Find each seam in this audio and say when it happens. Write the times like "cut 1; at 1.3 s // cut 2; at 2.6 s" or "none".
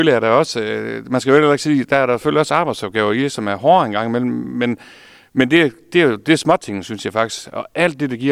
none

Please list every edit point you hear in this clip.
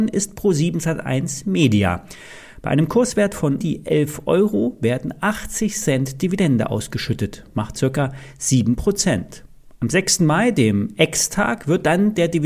cut 1; at 3.6 s

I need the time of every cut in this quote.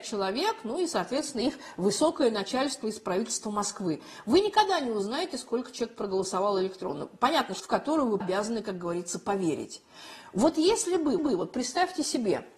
cut 1; at 7.6 s // cut 2; at 8.2 s // cut 3; at 11.2 s

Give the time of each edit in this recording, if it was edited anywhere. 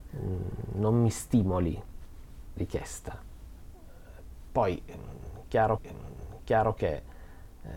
cut 1; at 2.6 s // cut 2; at 5.8 s

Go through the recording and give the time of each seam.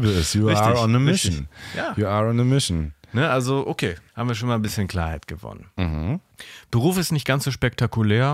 cut 1; at 4.1 s

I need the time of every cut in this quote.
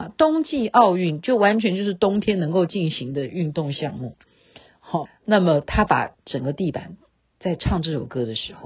cut 1; at 5.1 s

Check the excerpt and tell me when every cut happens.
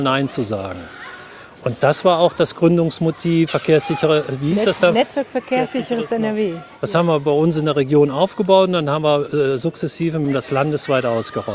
cut 1; at 3.5 s

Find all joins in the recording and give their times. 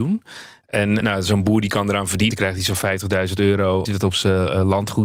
cut 1; at 1.0 s // cut 2; at 2.3 s // cut 3; at 3.9 s

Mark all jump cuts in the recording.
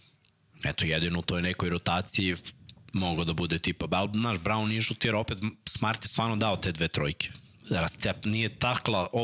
none

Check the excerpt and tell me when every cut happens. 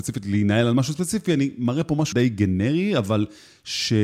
cut 1; at 2.1 s

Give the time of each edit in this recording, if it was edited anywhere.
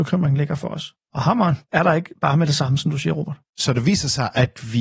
cut 1; at 1.0 s // cut 2; at 3.5 s

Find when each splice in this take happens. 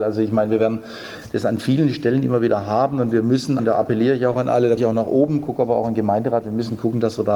cut 1; at 3.6 s // cut 2; at 4.8 s

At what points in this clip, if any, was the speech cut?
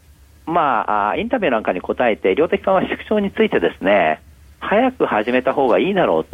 none

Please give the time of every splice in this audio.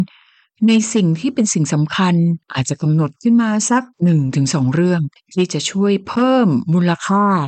cut 1; at 2.4 s // cut 2; at 3.9 s // cut 3; at 5.2 s

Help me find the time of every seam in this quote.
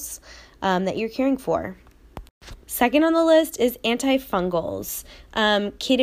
cut 1; at 2.6 s

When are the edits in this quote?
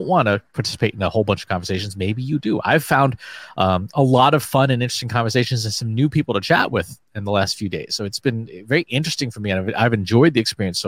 none

